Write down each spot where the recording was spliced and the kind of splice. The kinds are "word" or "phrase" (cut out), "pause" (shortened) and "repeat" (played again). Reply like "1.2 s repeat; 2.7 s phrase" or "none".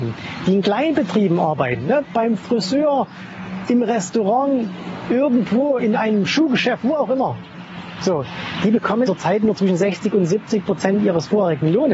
3.6 s word; 5.8 s word; 9.1 s word

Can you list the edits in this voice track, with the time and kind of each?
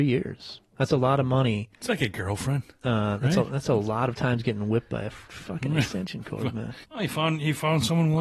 6.8 s pause

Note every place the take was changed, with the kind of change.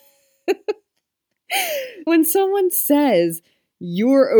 2.1 s word

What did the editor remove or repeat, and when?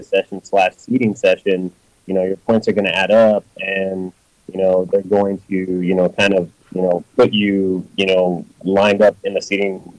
6.6 s pause

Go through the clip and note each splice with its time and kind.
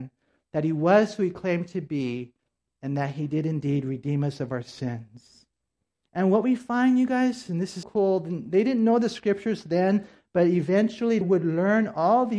7.8 s word; 11.2 s word

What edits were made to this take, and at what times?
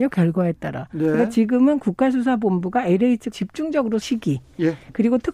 3.3 s word; 4.0 s word

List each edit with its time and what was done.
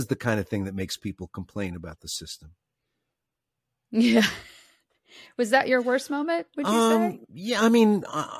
none

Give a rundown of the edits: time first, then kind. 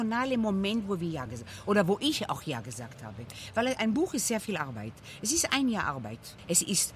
none

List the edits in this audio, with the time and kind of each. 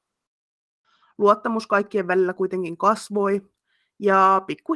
none

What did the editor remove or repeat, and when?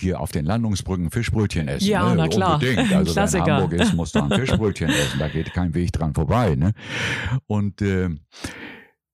none

